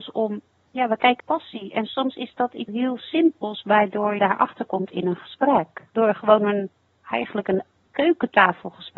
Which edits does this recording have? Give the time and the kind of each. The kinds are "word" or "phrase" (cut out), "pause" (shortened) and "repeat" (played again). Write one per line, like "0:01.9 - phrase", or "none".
0:01.2 - phrase
0:02.7 - word
0:04.2 - word